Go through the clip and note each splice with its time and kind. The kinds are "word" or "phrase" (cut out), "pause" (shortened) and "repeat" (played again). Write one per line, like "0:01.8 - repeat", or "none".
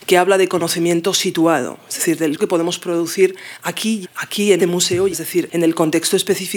0:02.4 - word
0:04.0 - word
0:04.6 - word
0:05.1 - word